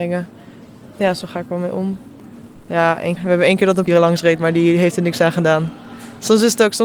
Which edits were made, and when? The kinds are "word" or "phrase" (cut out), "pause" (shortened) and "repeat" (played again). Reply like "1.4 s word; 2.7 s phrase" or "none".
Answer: 3.2 s word; 3.9 s word